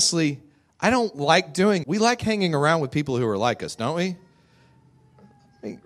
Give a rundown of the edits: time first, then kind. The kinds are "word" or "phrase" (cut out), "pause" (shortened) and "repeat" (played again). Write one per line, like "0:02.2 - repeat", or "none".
0:01.8 - word